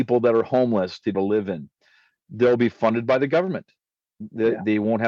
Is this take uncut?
no; 1 cut; at 1.1 s

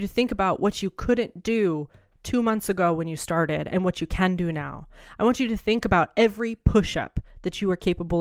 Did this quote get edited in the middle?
no; 0 cuts

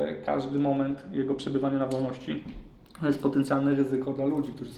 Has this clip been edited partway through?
no; 0 cuts

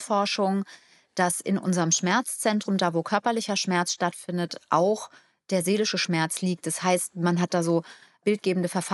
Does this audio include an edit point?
no; 0 cuts

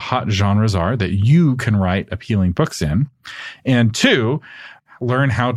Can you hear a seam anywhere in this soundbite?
no; 0 cuts

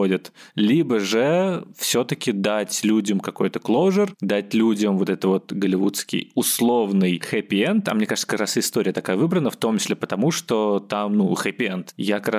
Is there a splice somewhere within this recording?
no; 0 cuts

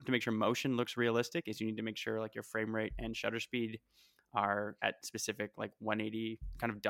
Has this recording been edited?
no; 0 cuts

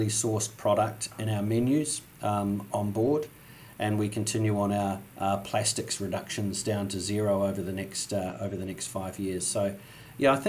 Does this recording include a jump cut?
yes; 1 cut; at 5.1 s

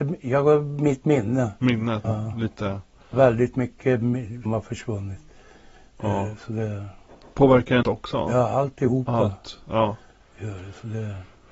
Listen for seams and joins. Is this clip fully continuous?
no; 4 cuts; at 2.0 s, 3.1 s, 4.5 s, 7.8 s

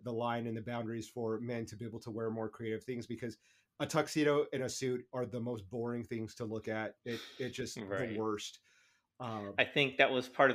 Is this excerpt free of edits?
yes; 0 cuts

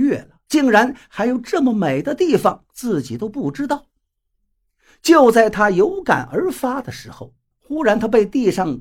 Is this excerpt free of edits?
yes; 0 cuts

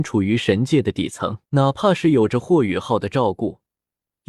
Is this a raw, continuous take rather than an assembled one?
no; 1 cut; at 1.4 s

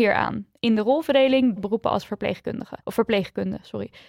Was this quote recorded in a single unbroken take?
no; 2 cuts; at 1.6 s, 2.8 s

